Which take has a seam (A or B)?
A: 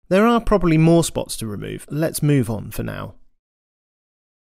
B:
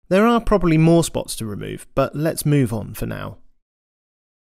A